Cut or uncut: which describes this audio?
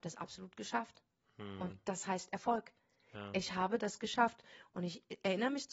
uncut